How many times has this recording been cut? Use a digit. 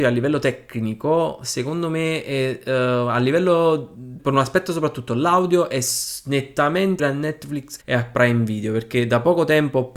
3